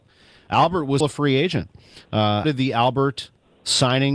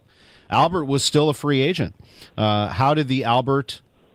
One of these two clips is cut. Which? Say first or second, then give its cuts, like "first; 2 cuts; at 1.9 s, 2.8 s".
first; 2 cuts; at 1.0 s, 2.4 s